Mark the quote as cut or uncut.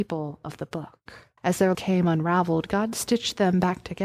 cut